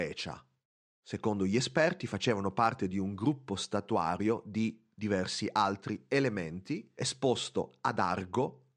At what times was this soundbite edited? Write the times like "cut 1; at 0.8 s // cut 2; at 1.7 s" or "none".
none